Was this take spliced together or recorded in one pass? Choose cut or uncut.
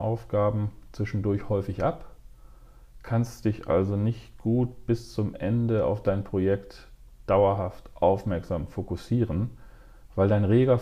uncut